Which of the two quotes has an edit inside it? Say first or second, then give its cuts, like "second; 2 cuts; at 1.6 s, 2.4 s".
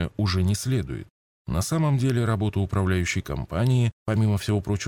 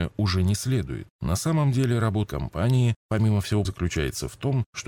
second; 3 cuts; at 1.1 s, 2.3 s, 3.6 s